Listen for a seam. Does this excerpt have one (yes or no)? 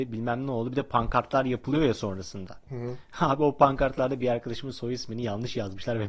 no